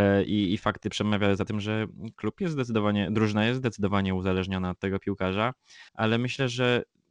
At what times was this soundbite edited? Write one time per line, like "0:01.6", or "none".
0:05.9